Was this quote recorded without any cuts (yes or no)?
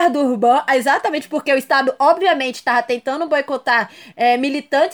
yes